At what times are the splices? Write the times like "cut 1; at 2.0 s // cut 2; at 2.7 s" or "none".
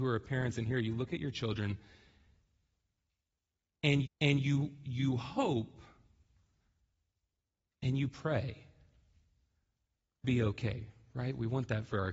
cut 1; at 4.1 s // cut 2; at 10.2 s